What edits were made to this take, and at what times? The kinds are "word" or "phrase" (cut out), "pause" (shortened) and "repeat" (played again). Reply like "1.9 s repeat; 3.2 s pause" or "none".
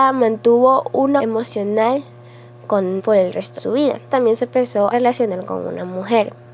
1.2 s word; 3.0 s word; 3.6 s word; 4.1 s word; 4.9 s word